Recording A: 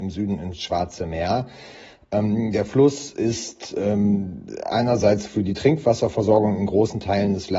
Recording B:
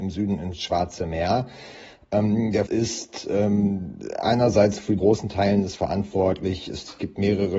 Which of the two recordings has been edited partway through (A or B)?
B